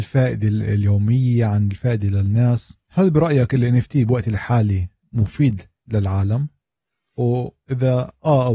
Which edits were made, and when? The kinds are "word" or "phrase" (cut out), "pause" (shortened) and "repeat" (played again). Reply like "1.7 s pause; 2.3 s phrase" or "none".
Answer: 2.8 s pause